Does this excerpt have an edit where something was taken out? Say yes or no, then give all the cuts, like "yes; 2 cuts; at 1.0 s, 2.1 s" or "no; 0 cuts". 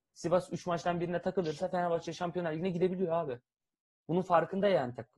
no; 0 cuts